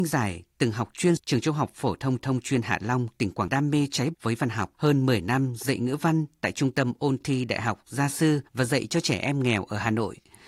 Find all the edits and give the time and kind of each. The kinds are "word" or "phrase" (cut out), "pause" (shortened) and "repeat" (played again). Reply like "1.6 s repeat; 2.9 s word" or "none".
1.2 s word; 2.2 s repeat; 3.5 s phrase; 4.1 s word; 4.7 s pause; 8.5 s pause